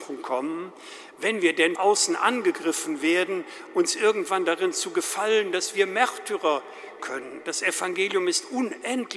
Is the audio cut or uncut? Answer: cut